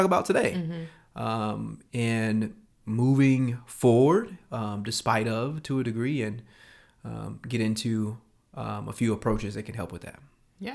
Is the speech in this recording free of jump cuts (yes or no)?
yes